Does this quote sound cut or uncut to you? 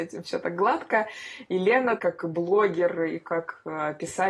cut